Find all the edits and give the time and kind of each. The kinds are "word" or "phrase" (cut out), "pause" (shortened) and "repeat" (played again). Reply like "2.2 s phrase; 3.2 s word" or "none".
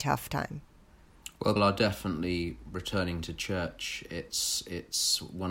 1.6 s word

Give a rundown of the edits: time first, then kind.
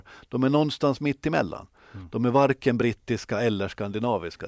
none

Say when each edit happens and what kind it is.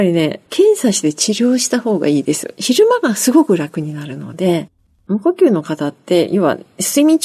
none

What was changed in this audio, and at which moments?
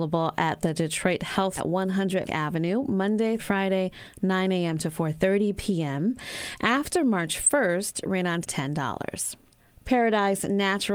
1.6 s word; 2.2 s word; 3.4 s word; 8.4 s phrase; 9.6 s pause

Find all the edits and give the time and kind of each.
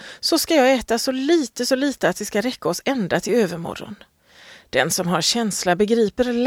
none

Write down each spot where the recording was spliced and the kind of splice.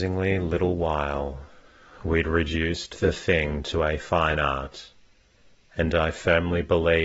none

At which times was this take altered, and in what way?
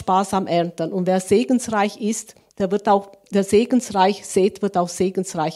none

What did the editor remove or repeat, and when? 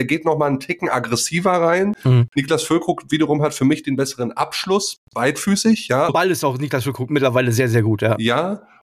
6.1 s word

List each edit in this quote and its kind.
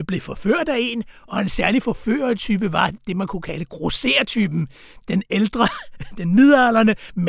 none

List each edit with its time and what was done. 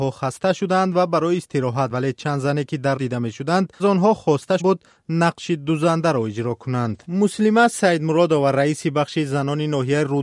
1.9 s word; 3.0 s word; 3.8 s word; 4.6 s word

